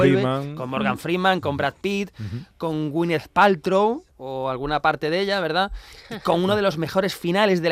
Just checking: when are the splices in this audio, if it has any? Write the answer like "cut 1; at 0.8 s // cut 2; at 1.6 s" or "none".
cut 1; at 4.1 s